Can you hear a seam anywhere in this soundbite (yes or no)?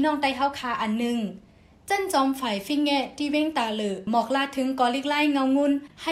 no